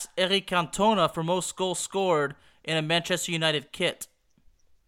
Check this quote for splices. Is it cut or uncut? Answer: uncut